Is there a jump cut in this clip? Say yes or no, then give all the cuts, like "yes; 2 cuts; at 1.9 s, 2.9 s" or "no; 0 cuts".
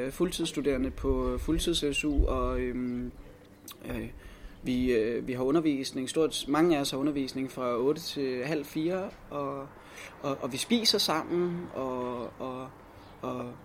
no; 0 cuts